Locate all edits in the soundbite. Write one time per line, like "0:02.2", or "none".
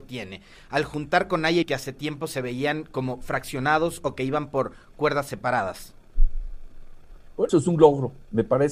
0:01.6
0:07.5